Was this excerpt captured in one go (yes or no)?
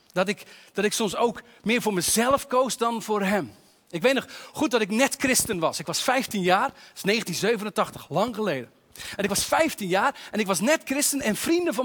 yes